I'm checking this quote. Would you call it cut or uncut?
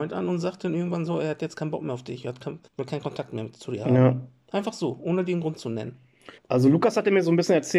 cut